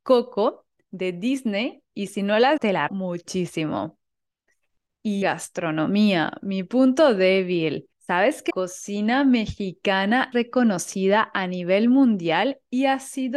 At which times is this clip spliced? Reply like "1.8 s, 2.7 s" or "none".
2.6 s, 2.9 s, 5.2 s, 7.9 s, 8.5 s, 10.3 s